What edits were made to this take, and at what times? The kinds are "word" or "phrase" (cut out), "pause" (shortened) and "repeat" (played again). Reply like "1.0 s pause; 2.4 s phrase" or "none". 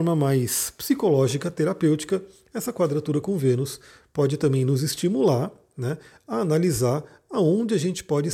none

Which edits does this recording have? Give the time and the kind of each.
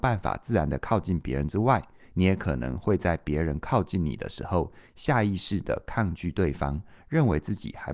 none

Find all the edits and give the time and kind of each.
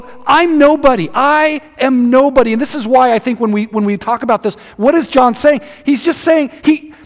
none

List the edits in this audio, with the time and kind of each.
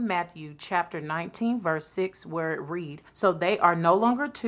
3.1 s pause

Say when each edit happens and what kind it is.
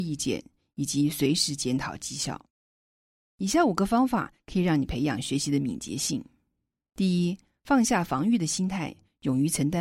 none

